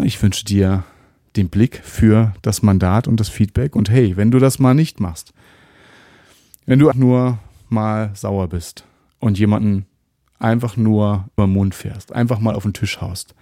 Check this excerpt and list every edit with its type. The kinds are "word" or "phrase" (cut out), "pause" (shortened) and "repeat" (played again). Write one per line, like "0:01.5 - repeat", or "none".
0:06.9 - word
0:11.4 - word